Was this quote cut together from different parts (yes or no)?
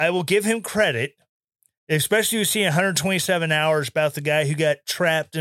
no